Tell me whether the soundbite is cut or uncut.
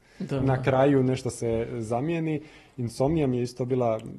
uncut